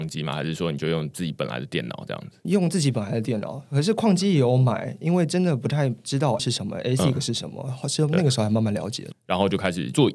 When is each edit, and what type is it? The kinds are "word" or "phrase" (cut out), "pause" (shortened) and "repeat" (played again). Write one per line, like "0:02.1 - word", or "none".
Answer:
0:06.4 - word